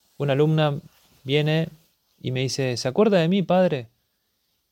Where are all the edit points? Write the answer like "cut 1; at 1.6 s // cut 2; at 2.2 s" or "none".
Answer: none